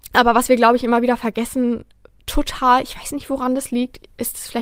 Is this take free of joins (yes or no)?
yes